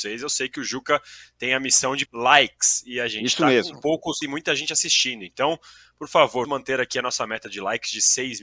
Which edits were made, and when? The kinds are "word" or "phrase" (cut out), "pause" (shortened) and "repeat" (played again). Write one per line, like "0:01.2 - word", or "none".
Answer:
0:02.1 - word
0:04.2 - word
0:06.4 - word